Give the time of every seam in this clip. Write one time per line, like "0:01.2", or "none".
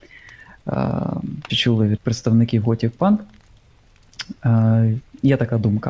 0:01.5
0:02.0

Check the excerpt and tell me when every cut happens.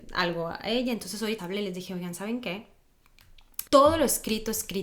0:01.4
0:03.7

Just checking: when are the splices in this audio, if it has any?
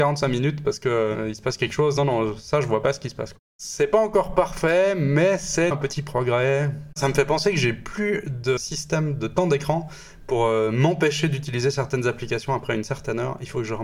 0:05.7

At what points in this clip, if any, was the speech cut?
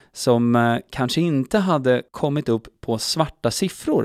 0:02.1

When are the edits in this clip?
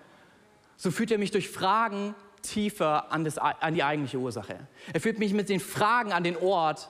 none

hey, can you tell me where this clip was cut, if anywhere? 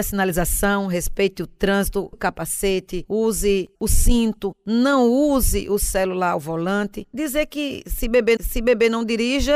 0:02.1
0:03.7
0:08.4

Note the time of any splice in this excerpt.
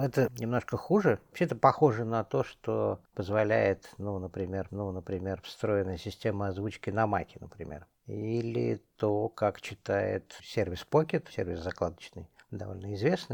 0:03.0
0:04.7
0:10.4
0:11.3

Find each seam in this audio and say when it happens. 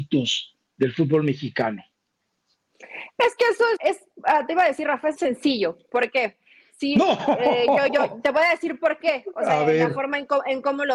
0:03.8
0:05.2
0:07.9

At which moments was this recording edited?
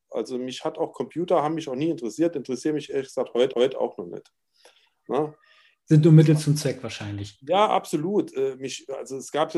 0:03.5

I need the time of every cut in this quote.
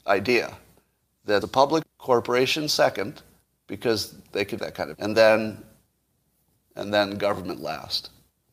0:01.4
0:01.8
0:04.6
0:04.9

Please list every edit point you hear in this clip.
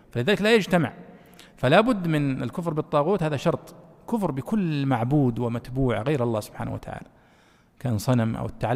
none

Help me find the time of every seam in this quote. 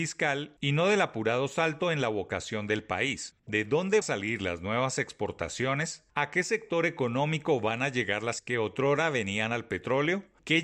0:04.0
0:08.4

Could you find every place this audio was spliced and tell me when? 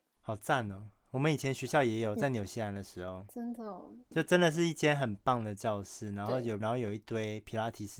0:04.1
0:06.6

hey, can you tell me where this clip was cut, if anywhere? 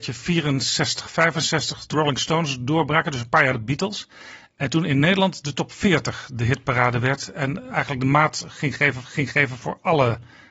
0:01.9
0:03.5
0:09.0

